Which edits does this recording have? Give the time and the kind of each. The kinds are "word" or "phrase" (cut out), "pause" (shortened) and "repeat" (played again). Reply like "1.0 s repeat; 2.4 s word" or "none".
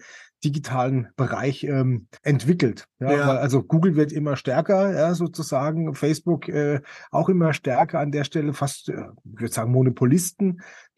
2.2 s pause